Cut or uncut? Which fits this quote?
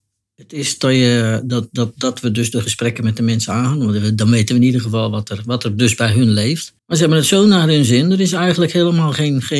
cut